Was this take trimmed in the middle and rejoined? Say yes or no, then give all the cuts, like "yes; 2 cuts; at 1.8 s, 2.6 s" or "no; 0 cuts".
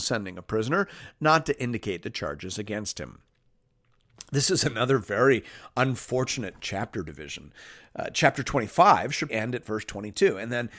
yes; 1 cut; at 9.3 s